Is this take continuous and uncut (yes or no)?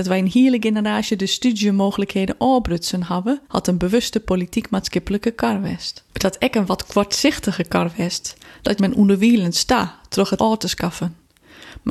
no